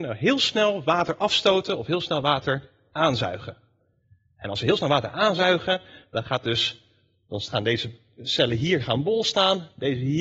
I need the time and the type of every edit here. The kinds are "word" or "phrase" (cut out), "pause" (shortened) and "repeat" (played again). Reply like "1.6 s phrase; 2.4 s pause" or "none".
none